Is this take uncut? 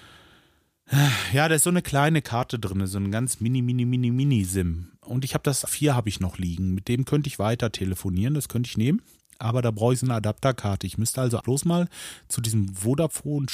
no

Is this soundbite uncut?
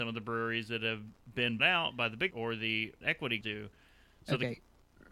no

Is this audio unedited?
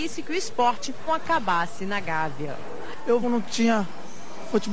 no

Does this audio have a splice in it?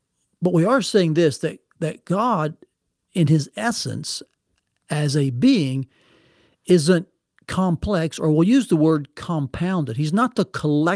no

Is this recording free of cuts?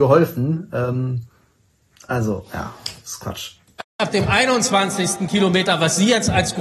yes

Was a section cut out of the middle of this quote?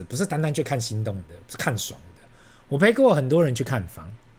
no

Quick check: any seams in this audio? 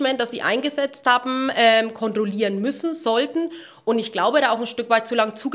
no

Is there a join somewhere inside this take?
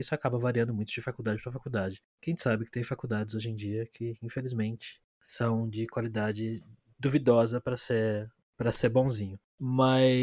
no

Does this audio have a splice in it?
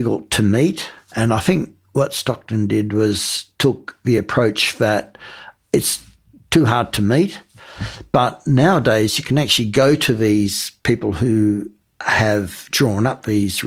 no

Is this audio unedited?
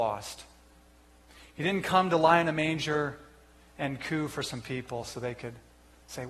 yes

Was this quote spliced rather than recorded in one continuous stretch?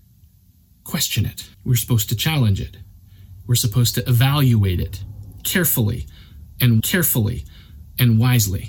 yes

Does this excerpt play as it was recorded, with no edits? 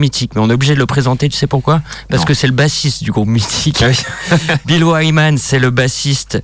yes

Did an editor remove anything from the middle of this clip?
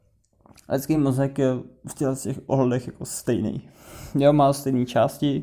no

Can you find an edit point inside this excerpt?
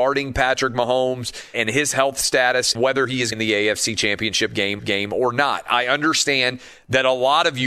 yes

